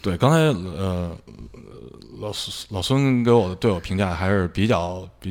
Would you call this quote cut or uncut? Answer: uncut